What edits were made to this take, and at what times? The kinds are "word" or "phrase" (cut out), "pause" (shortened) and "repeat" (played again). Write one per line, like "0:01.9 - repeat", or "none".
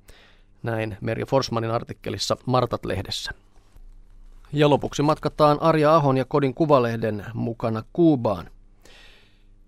0:04.4 - pause